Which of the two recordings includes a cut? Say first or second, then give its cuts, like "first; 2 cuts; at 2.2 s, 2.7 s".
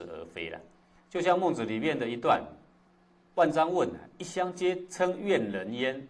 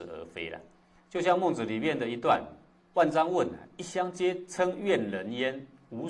second; 1 cut; at 2.8 s